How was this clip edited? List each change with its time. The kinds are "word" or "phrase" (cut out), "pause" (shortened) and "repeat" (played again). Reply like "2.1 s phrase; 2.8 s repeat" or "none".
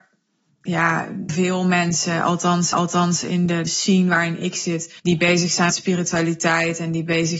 1.3 s word; 2.7 s repeat; 3.7 s word; 5.0 s pause; 5.7 s word